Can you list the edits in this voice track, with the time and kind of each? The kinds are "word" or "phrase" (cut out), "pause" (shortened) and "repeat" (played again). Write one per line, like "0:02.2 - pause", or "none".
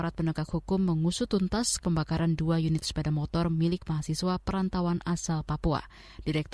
0:01.8 - word